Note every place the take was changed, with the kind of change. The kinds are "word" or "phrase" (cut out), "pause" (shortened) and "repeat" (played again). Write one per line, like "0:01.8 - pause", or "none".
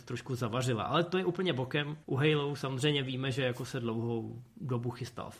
0:02.0 - pause